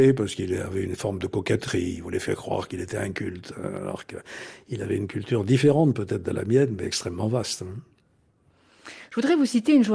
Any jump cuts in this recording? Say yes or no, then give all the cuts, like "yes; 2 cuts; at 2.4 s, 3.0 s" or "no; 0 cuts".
no; 0 cuts